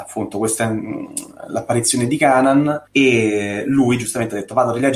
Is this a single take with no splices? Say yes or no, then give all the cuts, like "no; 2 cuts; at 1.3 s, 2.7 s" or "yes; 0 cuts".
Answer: no; 1 cut; at 2.9 s